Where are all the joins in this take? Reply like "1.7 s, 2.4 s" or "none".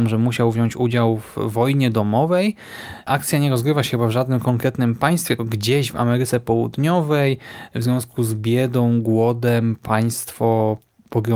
5.4 s